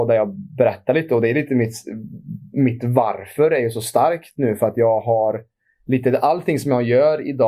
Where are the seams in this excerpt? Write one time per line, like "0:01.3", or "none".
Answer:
none